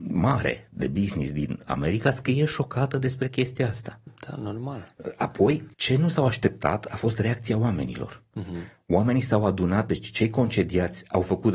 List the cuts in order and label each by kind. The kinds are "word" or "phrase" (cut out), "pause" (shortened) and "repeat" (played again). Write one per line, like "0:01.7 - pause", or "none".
0:05.7 - pause